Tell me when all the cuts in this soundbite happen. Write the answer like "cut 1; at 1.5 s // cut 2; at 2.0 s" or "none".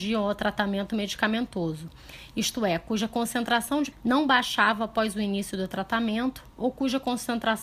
cut 1; at 3.9 s